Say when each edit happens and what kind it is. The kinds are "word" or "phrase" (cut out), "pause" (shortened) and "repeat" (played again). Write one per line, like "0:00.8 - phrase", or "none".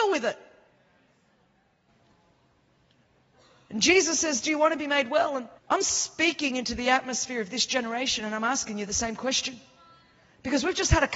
0:05.6 - pause